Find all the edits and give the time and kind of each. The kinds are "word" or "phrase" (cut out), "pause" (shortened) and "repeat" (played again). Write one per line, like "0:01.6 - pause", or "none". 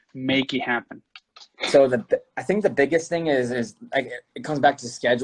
none